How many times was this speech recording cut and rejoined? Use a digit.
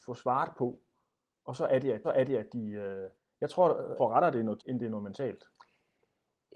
4